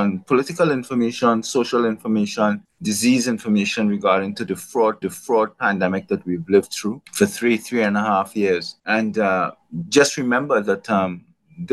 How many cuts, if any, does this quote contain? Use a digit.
4